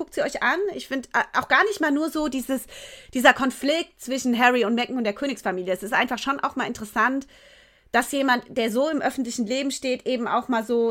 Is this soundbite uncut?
yes; 0 cuts

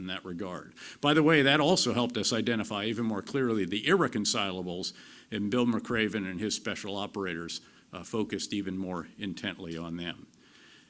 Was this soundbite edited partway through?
no; 0 cuts

